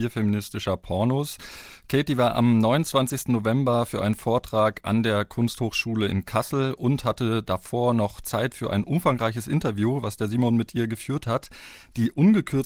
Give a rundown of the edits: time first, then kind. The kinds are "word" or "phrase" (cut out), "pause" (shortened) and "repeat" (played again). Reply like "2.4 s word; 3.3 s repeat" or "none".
none

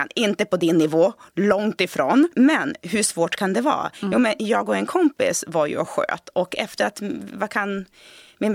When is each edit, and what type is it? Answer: none

